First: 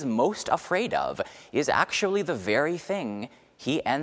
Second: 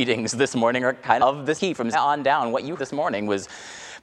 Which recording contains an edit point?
second; 4 cuts; at 1.2 s, 1.6 s, 1.9 s, 2.8 s

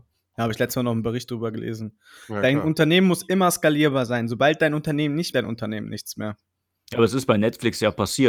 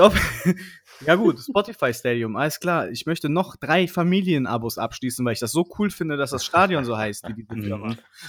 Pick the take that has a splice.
first; 1 cut; at 5.3 s

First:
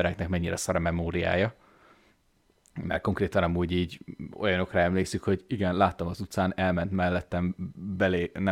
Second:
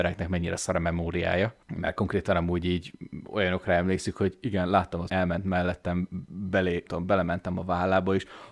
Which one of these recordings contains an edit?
second; 3 cuts; at 1.6 s, 5.1 s, 6.9 s

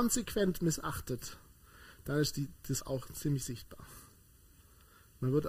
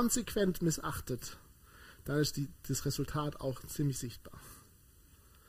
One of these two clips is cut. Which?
first; 1 cut; at 2.8 s

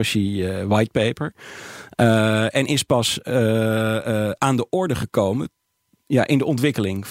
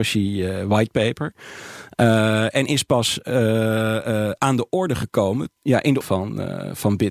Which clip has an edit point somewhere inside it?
second; 2 cuts; at 5.6 s, 6.0 s

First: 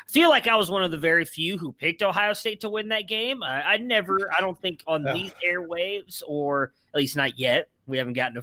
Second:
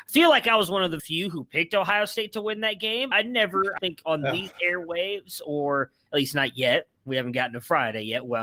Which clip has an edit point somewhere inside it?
second; 3 cuts; at 1.0 s, 3.1 s, 3.8 s

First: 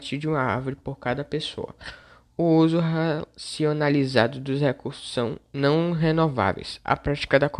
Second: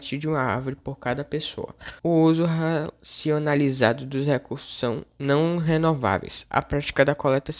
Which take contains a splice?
second; 1 cut; at 2.0 s

